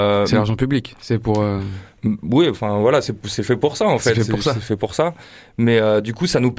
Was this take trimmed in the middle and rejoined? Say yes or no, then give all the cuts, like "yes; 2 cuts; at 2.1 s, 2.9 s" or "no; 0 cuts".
no; 0 cuts